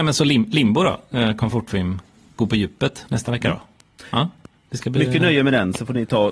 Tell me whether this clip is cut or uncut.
uncut